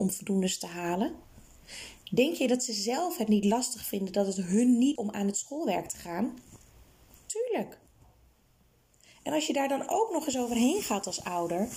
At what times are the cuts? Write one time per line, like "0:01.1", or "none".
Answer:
0:05.0

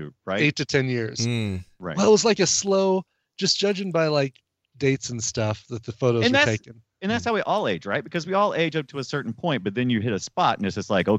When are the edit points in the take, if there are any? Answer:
none

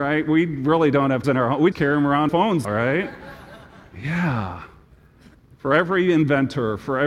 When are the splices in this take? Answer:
0:01.2
0:01.7
0:02.3
0:02.6
0:05.3

